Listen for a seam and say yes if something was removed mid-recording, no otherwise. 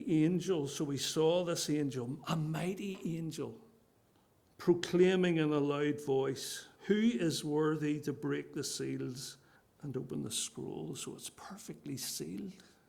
yes